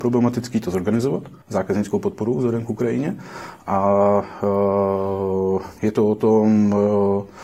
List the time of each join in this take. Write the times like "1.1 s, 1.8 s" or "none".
1.4 s, 5.8 s